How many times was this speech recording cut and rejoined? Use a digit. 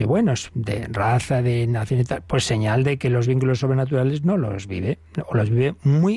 0